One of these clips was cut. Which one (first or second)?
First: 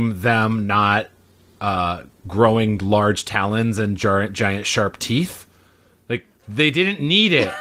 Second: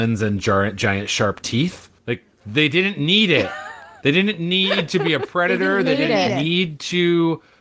second